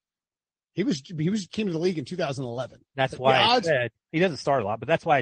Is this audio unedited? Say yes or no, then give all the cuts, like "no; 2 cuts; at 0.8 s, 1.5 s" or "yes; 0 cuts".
no; 1 cut; at 1.5 s